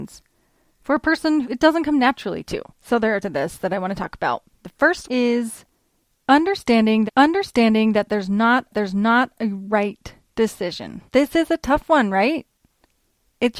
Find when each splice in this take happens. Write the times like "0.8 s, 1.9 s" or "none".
1.4 s, 2.7 s, 3.2 s, 4.5 s, 5.0 s, 7.1 s, 8.7 s, 11.1 s